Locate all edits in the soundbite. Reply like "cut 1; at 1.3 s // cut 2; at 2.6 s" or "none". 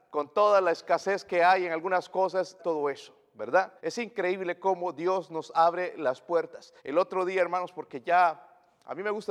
cut 1; at 2.6 s // cut 2; at 3.8 s // cut 3; at 6.8 s